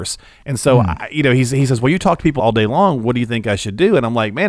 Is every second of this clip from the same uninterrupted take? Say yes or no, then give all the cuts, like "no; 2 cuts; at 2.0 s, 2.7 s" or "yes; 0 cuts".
no; 1 cut; at 2.4 s